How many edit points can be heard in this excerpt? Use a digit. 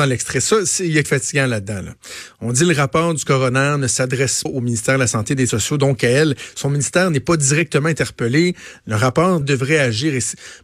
4